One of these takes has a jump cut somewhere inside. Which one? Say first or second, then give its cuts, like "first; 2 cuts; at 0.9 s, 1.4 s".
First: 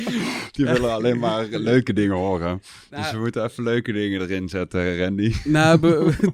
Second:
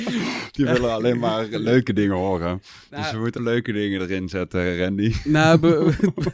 second; 1 cut; at 3.4 s